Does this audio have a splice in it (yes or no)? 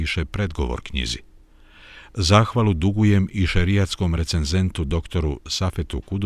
no